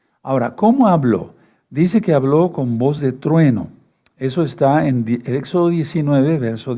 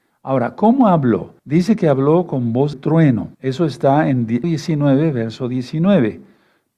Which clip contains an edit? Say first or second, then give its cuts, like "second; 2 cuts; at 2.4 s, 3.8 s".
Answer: second; 4 cuts; at 1.4 s, 2.7 s, 3.3 s, 4.4 s